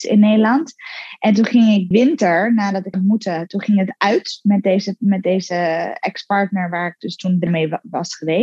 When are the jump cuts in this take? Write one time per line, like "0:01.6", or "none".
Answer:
0:01.9
0:02.9
0:07.5